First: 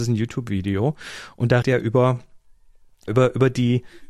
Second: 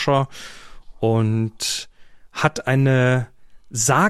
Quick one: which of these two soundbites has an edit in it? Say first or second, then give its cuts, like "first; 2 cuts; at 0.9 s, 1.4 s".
first; 2 cuts; at 1.6 s, 3.1 s